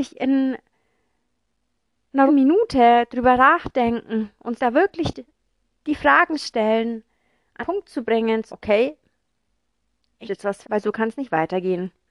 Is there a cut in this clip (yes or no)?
yes